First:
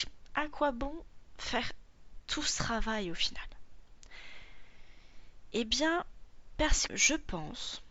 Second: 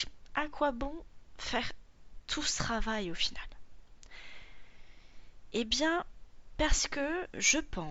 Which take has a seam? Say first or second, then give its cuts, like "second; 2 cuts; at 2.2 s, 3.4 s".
first; 1 cut; at 6.9 s